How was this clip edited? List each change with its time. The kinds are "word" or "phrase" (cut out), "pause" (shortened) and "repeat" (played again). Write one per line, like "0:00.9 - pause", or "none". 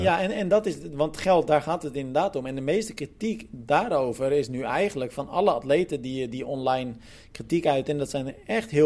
none